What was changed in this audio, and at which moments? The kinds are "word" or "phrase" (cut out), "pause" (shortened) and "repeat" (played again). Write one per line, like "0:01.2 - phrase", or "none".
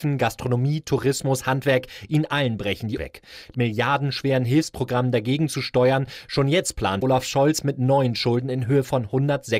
0:03.0 - word
0:03.5 - phrase
0:07.0 - word